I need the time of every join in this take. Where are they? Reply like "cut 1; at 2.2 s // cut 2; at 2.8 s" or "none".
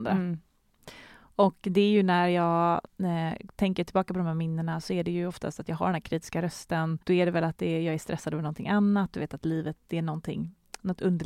cut 1; at 2.9 s // cut 2; at 7.0 s // cut 3; at 9.8 s